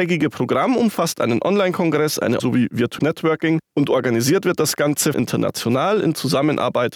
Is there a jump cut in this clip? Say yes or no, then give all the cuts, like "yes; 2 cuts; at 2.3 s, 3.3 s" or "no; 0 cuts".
yes; 3 cuts; at 2.4 s, 3.0 s, 5.1 s